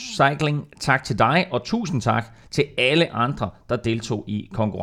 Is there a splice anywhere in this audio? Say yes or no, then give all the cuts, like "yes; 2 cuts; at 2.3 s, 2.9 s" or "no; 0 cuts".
no; 0 cuts